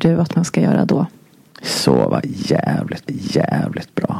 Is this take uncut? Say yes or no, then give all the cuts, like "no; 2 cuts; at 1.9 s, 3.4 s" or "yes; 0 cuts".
no; 1 cut; at 3.1 s